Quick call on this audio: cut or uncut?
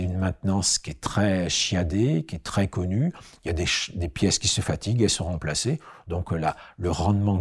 uncut